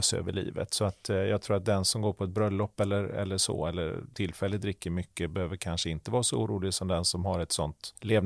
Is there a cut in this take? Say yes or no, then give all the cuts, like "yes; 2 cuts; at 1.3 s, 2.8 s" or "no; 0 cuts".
no; 0 cuts